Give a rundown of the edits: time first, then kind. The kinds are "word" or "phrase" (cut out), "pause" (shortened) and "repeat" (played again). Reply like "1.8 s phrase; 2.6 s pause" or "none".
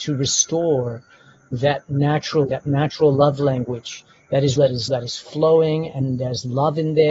2.5 s word; 4.6 s word; 4.9 s word